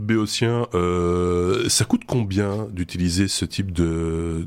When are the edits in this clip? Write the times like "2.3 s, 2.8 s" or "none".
none